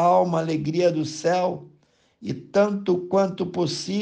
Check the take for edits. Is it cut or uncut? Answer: uncut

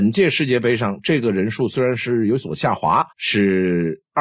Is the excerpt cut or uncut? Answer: cut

